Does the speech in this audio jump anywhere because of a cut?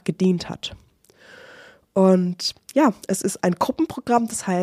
no; 0 cuts

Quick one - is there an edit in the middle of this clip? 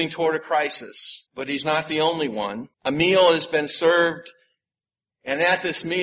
yes; 2 cuts; at 1.3 s, 2.7 s

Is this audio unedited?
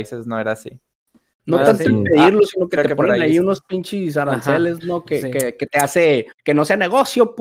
no; 1 cut; at 6.3 s

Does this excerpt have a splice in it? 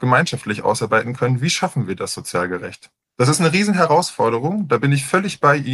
no; 0 cuts

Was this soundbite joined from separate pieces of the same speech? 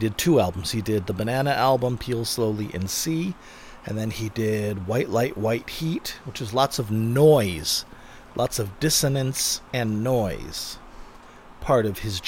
no; 0 cuts

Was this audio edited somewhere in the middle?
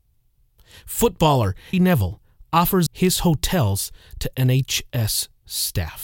yes; 2 cuts; at 1.7 s, 2.9 s

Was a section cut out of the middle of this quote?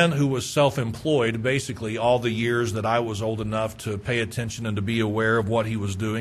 no; 0 cuts

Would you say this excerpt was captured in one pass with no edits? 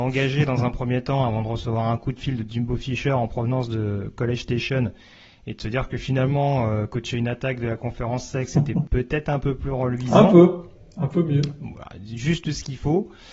yes; 0 cuts

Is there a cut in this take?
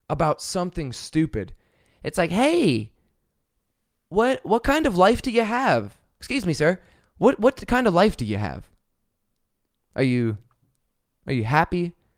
yes; 1 cut; at 0.9 s

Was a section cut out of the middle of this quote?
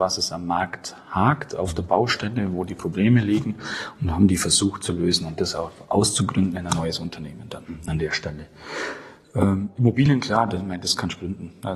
no; 0 cuts

